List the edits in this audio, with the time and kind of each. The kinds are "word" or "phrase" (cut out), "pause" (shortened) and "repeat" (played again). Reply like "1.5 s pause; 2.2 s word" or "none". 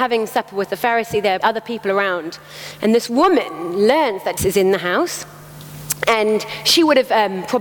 1.4 s word; 4.4 s word

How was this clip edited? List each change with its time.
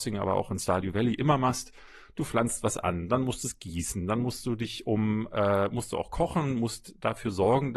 none

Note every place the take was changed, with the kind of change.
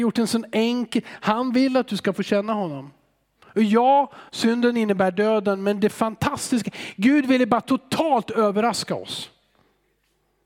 4.3 s pause

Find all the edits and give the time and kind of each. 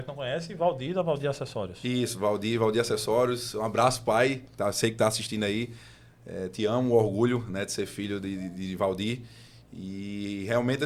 none

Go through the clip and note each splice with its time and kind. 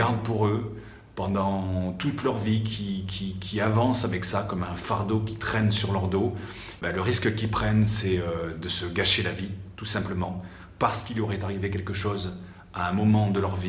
none

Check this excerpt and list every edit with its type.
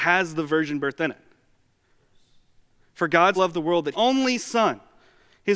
3.4 s word; 3.9 s phrase

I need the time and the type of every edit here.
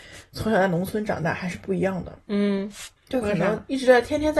3.0 s pause

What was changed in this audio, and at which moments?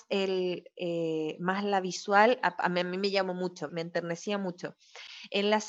3.7 s word

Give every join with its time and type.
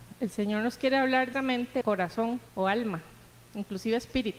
1.3 s word; 1.8 s word; 2.5 s pause

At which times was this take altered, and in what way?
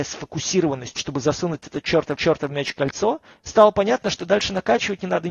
1.0 s phrase; 2.1 s repeat; 3.3 s pause

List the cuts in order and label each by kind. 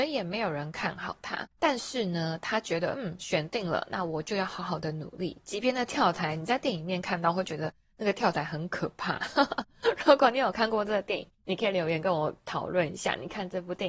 1.5 s pause; 11.3 s pause

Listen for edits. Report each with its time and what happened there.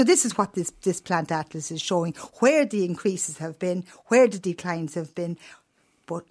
none

